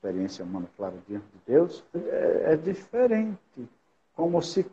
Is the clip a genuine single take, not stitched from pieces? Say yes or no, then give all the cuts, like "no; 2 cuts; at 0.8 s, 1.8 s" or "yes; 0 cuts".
no; 1 cut; at 1.9 s